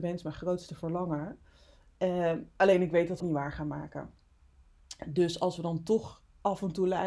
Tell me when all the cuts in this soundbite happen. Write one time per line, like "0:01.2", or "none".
0:03.2